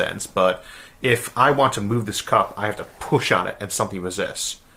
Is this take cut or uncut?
uncut